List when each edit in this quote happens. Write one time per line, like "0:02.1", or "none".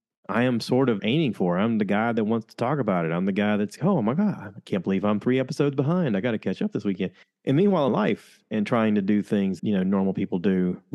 0:01.0
0:03.8
0:07.2
0:07.9
0:09.6